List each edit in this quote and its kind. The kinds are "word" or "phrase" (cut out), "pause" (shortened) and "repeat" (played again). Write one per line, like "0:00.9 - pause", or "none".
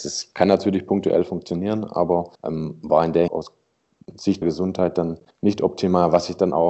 0:02.4 - pause
0:03.3 - phrase
0:04.4 - word
0:05.3 - pause